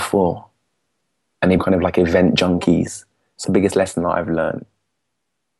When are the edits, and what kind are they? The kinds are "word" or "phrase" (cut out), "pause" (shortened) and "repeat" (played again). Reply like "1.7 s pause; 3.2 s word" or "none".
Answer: 1.6 s word; 3.4 s word